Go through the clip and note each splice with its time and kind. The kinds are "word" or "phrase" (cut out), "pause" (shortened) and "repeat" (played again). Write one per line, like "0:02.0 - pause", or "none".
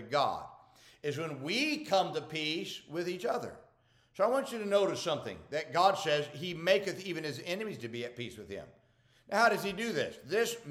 none